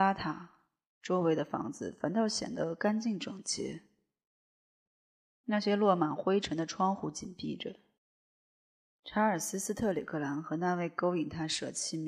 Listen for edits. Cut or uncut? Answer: uncut